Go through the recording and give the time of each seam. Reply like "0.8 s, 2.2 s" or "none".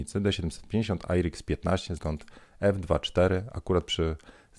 2.0 s